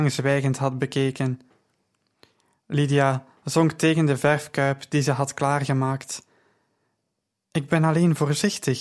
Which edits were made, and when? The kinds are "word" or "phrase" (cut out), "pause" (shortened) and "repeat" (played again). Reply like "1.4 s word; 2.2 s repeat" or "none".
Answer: none